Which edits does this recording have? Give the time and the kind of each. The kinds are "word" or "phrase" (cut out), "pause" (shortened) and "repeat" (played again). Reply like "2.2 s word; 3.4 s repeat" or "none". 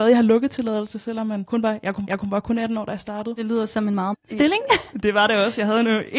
2.1 s repeat; 4.1 s word